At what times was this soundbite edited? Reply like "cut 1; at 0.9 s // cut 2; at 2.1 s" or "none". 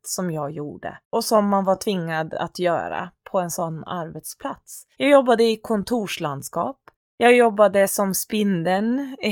cut 1; at 1.0 s // cut 2; at 4.9 s // cut 3; at 6.9 s